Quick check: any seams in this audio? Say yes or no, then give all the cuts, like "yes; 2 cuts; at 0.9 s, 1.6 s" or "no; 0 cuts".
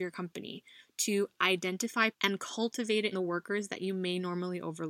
yes; 2 cuts; at 2.1 s, 3.1 s